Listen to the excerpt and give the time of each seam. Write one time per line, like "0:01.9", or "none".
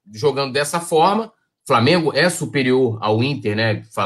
none